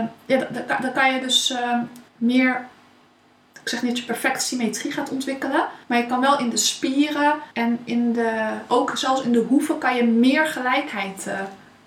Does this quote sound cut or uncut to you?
cut